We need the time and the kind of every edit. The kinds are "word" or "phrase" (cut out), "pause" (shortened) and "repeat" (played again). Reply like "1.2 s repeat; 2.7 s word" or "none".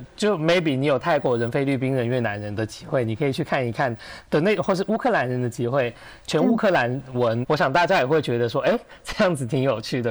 7.4 s word